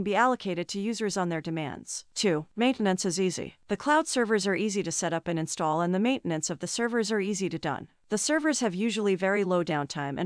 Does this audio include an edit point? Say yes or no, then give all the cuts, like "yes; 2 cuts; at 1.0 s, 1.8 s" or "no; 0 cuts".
no; 0 cuts